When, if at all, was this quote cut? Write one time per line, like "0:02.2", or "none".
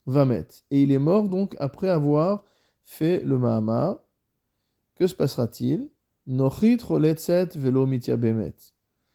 none